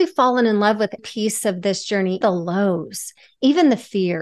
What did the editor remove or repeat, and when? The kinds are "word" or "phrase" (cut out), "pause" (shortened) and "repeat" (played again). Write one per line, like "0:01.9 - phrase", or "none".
0:01.0 - word
0:02.2 - word